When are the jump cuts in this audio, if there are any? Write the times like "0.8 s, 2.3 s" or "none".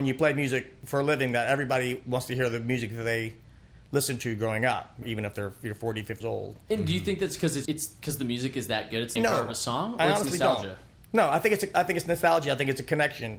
5.0 s, 6.2 s, 7.7 s, 9.2 s